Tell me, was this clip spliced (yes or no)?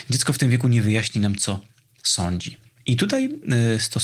no